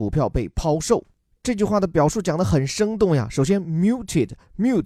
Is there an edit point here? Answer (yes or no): no